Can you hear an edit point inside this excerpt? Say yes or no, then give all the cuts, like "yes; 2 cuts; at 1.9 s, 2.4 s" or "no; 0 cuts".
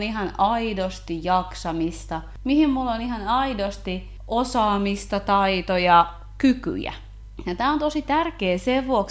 no; 0 cuts